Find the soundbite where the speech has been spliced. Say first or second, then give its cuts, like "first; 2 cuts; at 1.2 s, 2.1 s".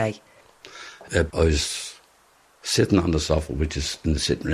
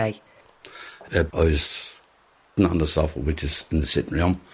second; 1 cut; at 2.6 s